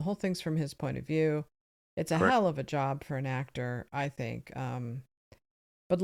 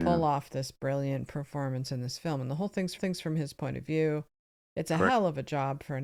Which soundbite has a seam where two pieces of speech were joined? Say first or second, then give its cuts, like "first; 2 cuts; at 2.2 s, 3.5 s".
second; 1 cut; at 3.0 s